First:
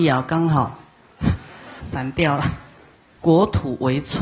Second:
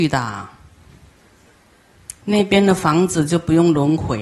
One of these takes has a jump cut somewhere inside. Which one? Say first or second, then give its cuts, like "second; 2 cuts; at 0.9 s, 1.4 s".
first; 2 cuts; at 1.8 s, 2.8 s